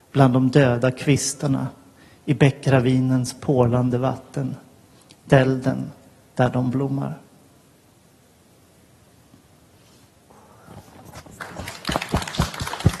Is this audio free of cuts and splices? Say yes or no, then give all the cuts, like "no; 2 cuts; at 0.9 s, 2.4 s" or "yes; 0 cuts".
yes; 0 cuts